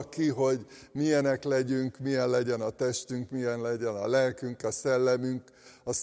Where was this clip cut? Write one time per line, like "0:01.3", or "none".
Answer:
none